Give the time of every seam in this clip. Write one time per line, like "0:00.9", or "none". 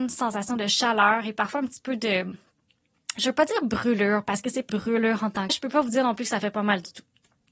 0:04.7
0:05.5